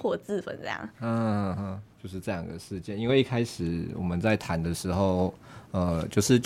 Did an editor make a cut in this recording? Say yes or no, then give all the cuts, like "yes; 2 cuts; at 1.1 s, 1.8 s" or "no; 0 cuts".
yes; 2 cuts; at 0.9 s, 1.9 s